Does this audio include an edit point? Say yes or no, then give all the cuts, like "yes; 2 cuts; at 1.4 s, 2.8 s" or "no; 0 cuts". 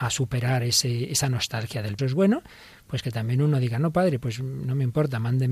yes; 1 cut; at 2.0 s